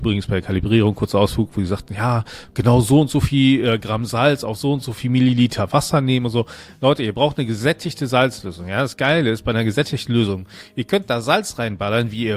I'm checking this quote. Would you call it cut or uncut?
uncut